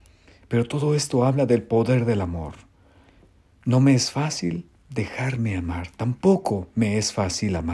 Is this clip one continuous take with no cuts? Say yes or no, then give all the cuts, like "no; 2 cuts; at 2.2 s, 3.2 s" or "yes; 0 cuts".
yes; 0 cuts